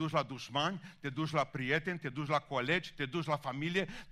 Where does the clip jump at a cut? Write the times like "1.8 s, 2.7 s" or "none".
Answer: none

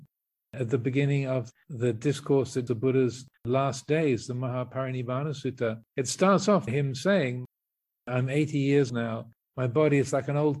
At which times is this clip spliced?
2.7 s, 3.4 s, 5.9 s, 6.7 s, 8.9 s

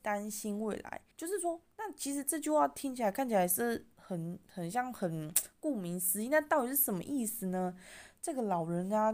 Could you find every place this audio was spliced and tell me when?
1.1 s

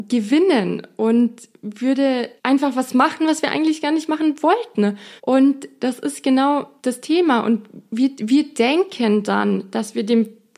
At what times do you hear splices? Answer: 2.4 s, 5.2 s, 6.8 s

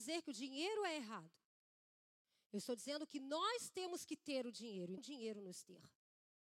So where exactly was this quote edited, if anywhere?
5.0 s

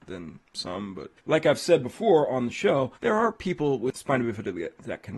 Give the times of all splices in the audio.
1.2 s, 2.9 s

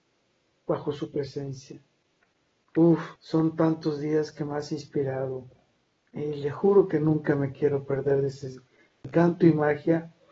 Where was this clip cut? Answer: 3.2 s, 5.8 s

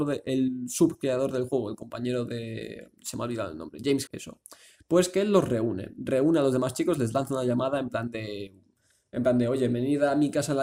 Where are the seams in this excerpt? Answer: 4.1 s

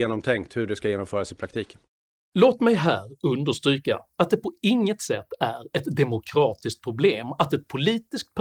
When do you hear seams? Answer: none

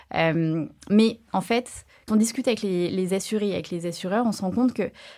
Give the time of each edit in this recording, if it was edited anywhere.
2.1 s

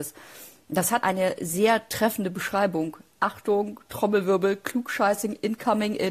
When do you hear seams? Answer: 1.0 s

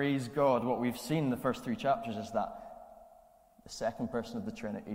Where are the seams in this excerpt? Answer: none

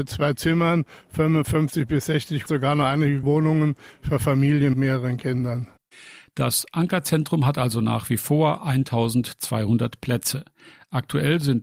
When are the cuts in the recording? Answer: 2.5 s, 3.2 s, 4.7 s

